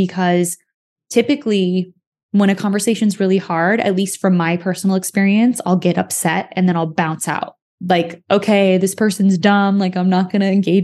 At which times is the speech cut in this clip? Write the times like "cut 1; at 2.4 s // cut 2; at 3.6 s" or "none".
none

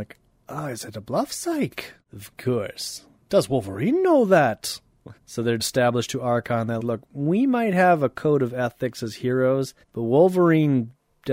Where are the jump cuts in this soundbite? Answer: cut 1; at 5.2 s // cut 2; at 5.6 s // cut 3; at 6.8 s // cut 4; at 9.8 s

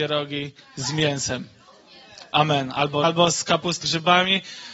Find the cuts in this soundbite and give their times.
cut 1; at 3.0 s // cut 2; at 3.8 s

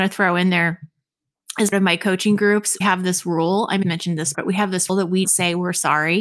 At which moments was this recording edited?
cut 1; at 1.7 s // cut 2; at 2.8 s // cut 3; at 3.8 s // cut 4; at 4.3 s // cut 5; at 4.9 s // cut 6; at 5.2 s

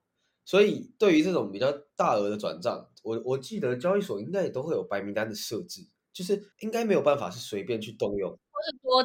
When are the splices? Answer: cut 1; at 6.5 s

